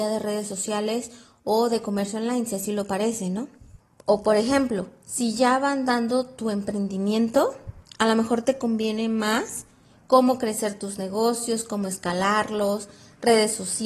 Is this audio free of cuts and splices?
yes; 0 cuts

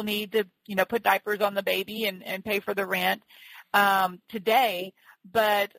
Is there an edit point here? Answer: no; 0 cuts

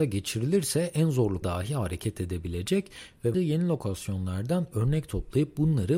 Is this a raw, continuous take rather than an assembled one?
no; 2 cuts; at 1.4 s, 3.3 s

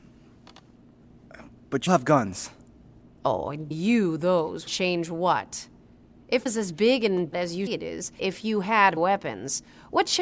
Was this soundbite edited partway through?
yes; 8 cuts; at 1.9 s, 3.7 s, 4.7 s, 6.5 s, 7.3 s, 7.7 s, 8.2 s, 9.0 s

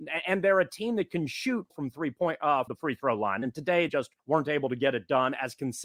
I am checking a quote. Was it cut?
yes; 4 cuts; at 1.7 s, 2.7 s, 3.9 s, 4.2 s

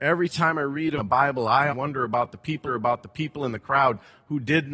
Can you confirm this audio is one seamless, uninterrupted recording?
no; 3 cuts; at 1.0 s, 1.7 s, 2.7 s

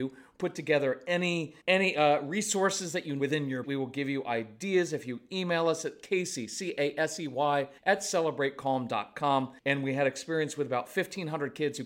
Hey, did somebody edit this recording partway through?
yes; 5 cuts; at 1.6 s, 3.2 s, 3.6 s, 7.8 s, 9.6 s

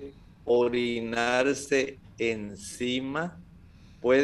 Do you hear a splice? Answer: no; 0 cuts

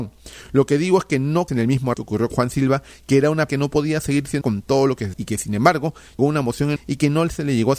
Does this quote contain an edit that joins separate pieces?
yes; 8 cuts; at 1.5 s, 1.9 s, 2.3 s, 3.5 s, 4.4 s, 5.1 s, 6.2 s, 6.8 s

